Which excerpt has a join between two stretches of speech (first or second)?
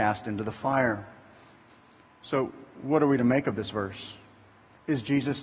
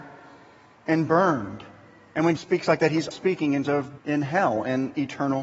second